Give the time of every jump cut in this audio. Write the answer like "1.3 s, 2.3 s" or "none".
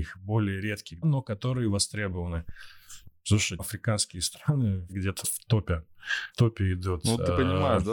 1.0 s, 3.6 s, 4.9 s, 5.2 s, 6.3 s

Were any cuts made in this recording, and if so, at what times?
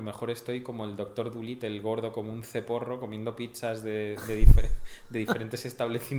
none

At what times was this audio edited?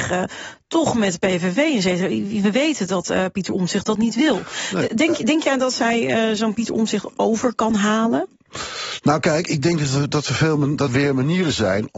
10.9 s

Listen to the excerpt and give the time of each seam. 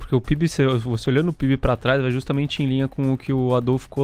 none

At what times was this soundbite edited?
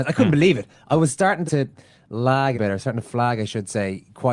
1.5 s, 2.5 s

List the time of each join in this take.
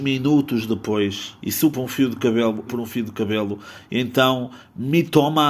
1.4 s, 1.7 s, 2.7 s

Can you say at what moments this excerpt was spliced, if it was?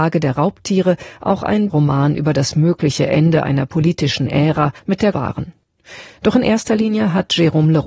1.7 s, 4.8 s, 5.1 s

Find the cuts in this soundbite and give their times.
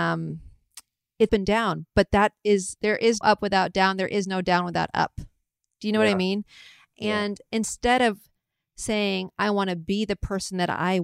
1.3 s, 3.2 s

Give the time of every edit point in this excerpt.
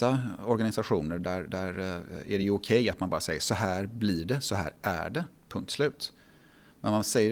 none

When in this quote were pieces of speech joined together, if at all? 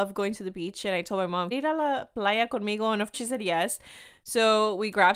1.5 s, 3.1 s

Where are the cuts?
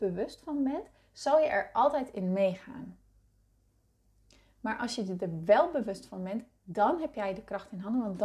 none

